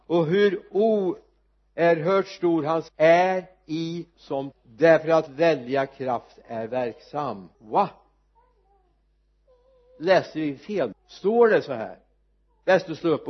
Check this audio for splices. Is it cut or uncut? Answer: cut